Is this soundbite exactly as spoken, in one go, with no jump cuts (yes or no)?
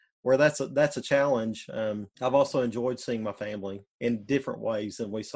no